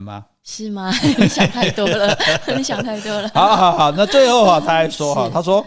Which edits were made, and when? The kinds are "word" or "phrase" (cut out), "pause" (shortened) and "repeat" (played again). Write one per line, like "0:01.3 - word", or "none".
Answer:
none